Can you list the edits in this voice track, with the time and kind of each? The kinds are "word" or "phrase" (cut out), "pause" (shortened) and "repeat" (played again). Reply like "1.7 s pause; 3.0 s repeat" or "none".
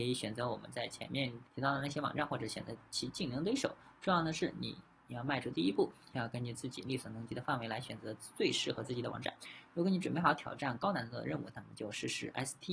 1.5 s pause